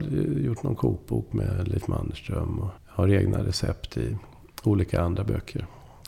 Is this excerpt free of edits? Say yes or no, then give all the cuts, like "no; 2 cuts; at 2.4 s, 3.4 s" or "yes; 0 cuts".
no; 1 cut; at 2.8 s